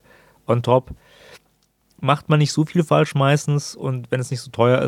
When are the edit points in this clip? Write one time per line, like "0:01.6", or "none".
none